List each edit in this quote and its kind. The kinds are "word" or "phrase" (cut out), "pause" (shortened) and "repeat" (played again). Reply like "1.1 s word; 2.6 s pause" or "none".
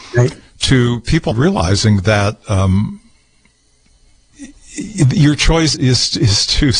1.3 s word; 4.3 s word; 5.7 s word